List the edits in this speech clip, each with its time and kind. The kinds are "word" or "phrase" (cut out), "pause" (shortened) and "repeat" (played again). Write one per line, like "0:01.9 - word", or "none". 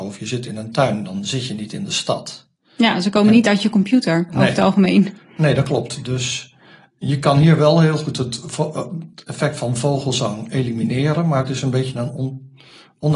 none